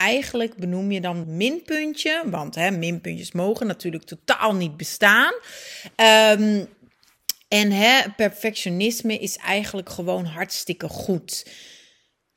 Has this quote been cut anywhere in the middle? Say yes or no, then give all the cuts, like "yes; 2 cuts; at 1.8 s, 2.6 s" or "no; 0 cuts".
yes; 1 cut; at 1.2 s